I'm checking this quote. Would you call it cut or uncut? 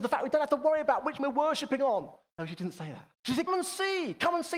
cut